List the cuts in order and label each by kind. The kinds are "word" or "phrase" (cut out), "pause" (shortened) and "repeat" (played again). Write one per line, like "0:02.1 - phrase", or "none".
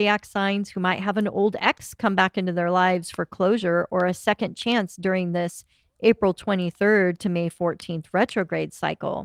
none